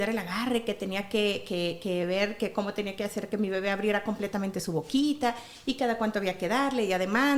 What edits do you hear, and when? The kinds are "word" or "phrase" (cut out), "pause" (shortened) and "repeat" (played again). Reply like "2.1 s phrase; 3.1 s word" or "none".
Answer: none